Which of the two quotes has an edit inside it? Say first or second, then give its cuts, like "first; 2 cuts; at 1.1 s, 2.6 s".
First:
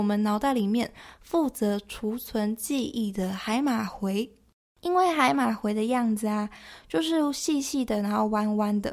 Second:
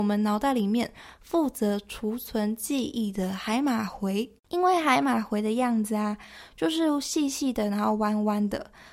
second; 1 cut; at 4.4 s